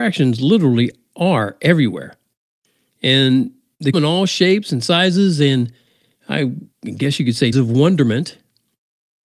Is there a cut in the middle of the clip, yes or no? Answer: yes